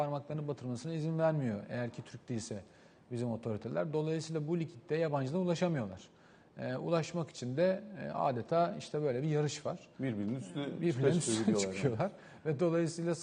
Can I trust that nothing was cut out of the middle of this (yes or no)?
yes